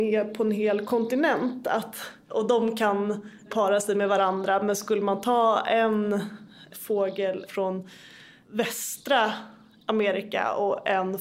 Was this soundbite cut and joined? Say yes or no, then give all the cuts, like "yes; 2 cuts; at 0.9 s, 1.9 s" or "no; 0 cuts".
no; 0 cuts